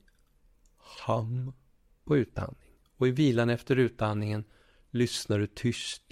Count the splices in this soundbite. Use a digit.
0